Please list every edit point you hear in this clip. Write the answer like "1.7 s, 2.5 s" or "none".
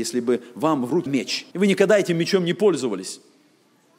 1.1 s, 1.5 s